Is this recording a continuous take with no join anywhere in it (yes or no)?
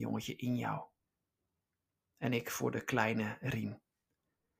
yes